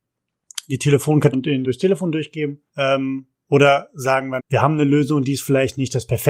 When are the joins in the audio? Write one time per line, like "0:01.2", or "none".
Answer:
0:01.3
0:01.6
0:02.7
0:04.4